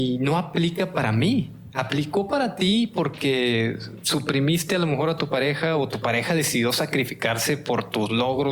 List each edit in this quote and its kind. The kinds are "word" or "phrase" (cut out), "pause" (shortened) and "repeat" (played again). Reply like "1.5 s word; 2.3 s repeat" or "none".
none